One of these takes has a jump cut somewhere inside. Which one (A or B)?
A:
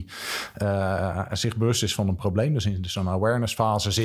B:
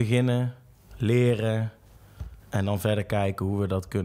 B